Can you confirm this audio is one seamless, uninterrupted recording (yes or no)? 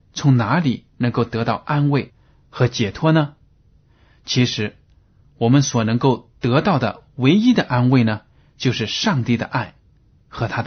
yes